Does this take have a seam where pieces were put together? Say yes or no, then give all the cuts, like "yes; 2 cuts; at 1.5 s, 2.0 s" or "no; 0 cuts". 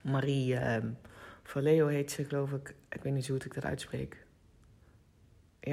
no; 0 cuts